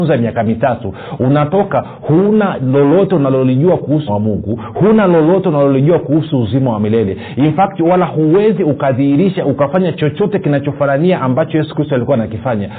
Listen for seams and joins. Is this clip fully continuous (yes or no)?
no